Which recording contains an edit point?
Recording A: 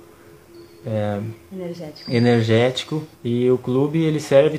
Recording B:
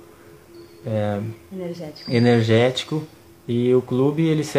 A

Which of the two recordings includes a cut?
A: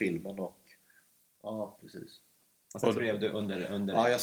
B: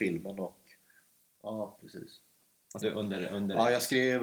B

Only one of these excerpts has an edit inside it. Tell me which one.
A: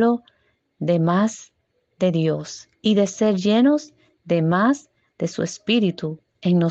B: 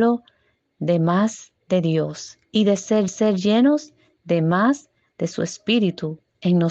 B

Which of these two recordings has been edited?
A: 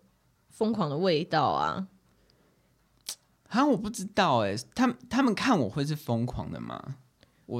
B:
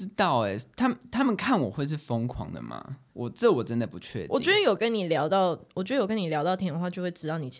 B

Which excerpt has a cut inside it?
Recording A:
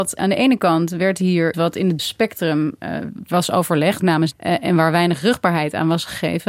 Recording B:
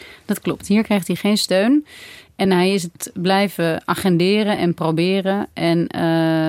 A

